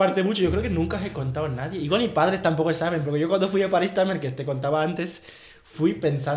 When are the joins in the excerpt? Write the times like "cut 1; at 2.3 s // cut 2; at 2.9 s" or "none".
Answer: none